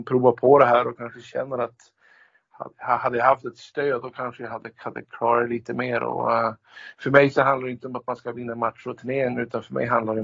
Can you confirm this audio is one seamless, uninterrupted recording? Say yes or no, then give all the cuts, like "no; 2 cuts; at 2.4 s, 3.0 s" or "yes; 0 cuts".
yes; 0 cuts